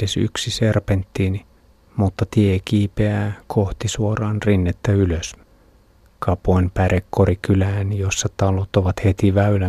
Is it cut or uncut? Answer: uncut